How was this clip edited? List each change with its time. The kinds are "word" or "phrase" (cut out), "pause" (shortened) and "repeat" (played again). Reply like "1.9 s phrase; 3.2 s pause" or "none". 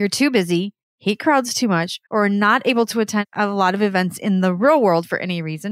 2.1 s pause